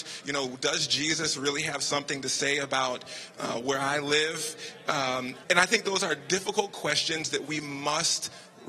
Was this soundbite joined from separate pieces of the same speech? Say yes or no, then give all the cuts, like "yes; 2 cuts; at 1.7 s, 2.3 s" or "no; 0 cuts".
yes; 1 cut; at 5.4 s